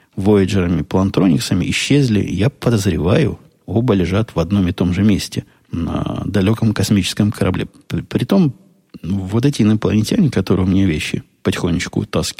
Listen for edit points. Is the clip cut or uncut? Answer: cut